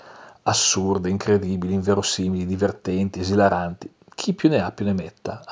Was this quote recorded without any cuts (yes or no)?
yes